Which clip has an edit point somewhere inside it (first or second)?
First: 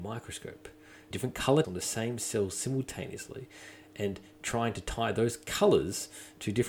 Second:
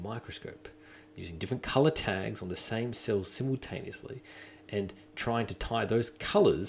first